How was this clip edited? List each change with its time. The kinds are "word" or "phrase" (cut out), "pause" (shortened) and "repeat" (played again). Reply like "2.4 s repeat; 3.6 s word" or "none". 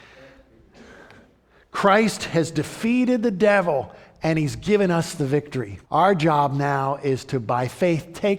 5.8 s pause

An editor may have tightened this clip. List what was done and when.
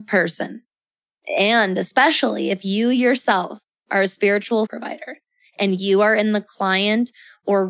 4.7 s word

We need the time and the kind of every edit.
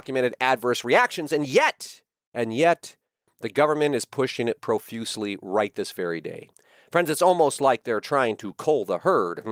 none

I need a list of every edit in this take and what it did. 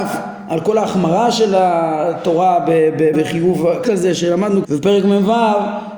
3.1 s word; 3.8 s word; 4.6 s phrase

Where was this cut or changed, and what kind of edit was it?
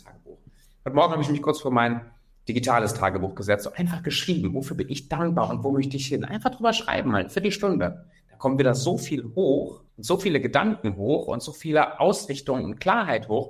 9.9 s pause

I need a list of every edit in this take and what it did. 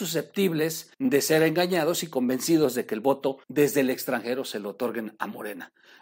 0.9 s pause; 3.4 s pause

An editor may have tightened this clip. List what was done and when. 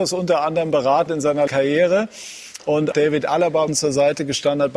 1.1 s word; 1.5 s word; 2.9 s word; 3.7 s word

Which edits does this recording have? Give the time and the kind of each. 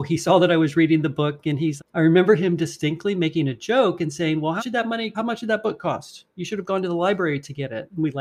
1.8 s word; 4.6 s word; 5.1 s word

